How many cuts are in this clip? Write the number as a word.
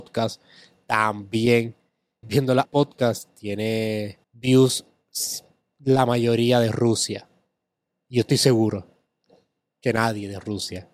three